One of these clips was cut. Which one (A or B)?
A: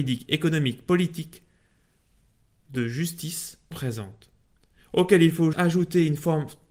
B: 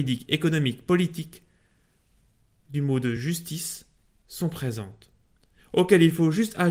A